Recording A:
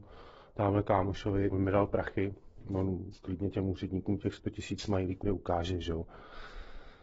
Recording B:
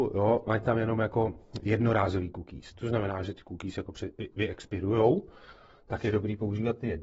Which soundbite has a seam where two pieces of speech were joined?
A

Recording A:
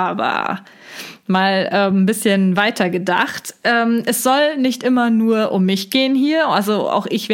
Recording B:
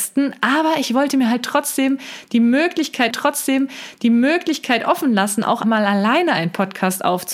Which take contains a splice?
B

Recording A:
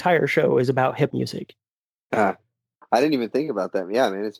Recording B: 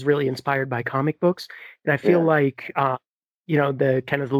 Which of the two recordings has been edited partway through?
A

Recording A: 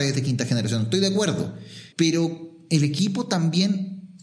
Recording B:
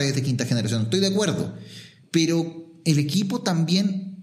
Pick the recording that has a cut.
A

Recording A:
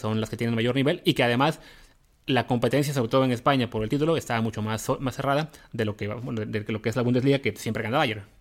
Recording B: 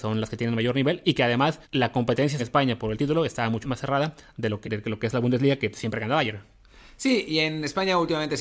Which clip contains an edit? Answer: B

